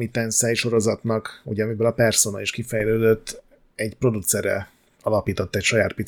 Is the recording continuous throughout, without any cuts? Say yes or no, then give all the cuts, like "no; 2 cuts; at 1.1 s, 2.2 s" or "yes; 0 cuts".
yes; 0 cuts